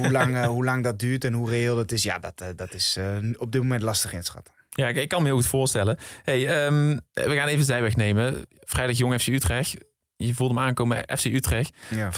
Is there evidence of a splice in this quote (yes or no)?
no